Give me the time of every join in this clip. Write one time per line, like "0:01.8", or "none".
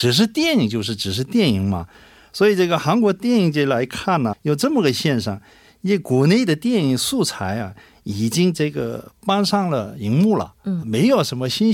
0:04.3
0:10.8